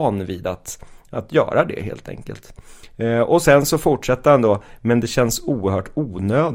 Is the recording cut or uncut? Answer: uncut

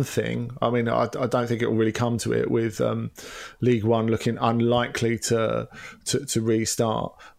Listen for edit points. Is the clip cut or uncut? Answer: uncut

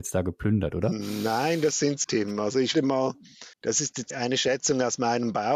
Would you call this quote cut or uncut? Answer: cut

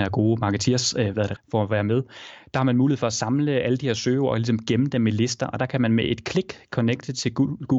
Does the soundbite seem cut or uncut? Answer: cut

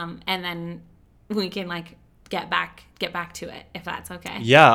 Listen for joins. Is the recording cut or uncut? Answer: uncut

